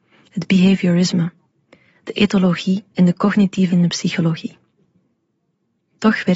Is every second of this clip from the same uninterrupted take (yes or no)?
no